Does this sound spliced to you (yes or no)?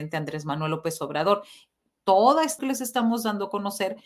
yes